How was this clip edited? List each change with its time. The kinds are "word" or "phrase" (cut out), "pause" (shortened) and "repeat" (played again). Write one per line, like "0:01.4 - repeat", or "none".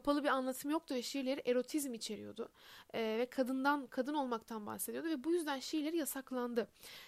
none

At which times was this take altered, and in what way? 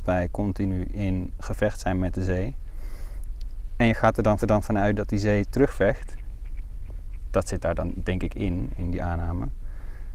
0:04.4 - repeat

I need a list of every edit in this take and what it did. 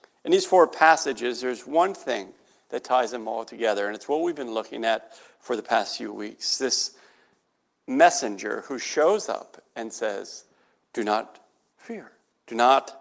none

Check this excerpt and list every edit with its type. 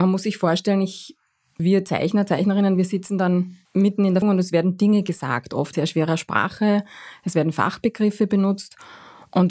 0:01.6 - word
0:03.6 - pause
0:04.2 - word
0:05.7 - word

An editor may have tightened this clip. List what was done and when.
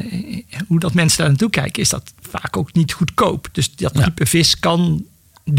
none

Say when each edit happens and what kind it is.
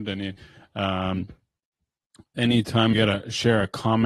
0:02.9 - word

